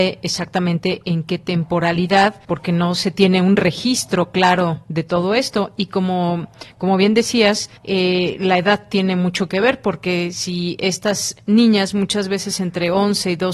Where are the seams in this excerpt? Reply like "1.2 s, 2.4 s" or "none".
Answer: 2.4 s, 7.8 s